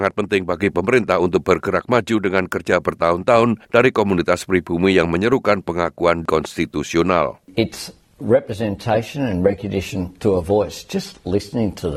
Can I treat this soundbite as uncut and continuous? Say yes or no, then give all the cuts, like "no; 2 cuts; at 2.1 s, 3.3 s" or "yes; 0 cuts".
no; 2 cuts; at 3.6 s, 7.4 s